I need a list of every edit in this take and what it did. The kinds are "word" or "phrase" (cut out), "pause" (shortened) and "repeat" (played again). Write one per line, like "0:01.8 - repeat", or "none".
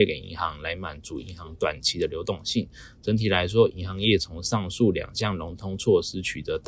none